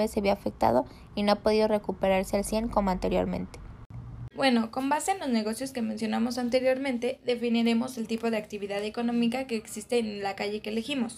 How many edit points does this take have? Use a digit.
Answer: 1